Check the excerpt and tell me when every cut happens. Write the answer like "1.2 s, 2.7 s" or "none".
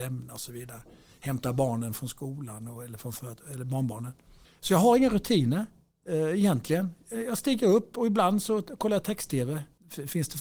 none

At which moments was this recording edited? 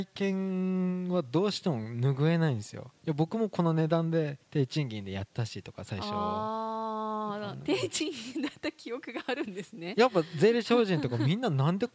3.0 s, 4.4 s

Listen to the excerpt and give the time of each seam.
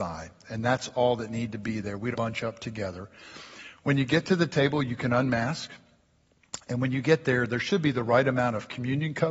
2.1 s

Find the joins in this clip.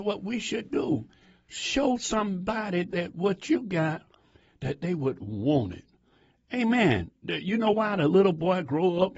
none

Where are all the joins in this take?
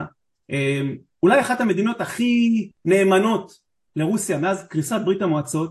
2.8 s

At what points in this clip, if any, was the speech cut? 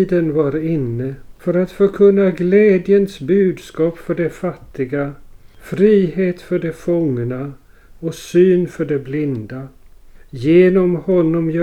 none

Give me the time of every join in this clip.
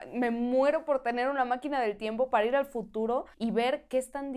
3.3 s

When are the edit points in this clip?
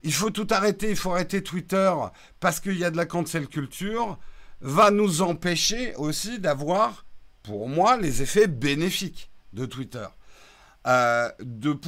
none

